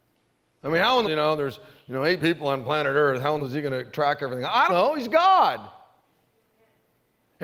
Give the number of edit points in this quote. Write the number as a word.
four